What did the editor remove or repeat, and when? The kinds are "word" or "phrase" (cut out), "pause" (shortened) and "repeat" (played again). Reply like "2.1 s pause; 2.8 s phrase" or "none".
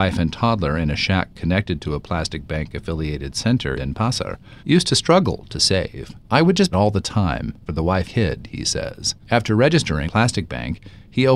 3.8 s word; 4.6 s pause; 6.2 s pause; 6.7 s phrase; 7.7 s phrase; 8.0 s word; 9.2 s pause; 10.1 s word